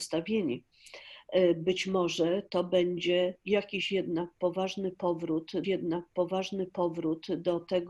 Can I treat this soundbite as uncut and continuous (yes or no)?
no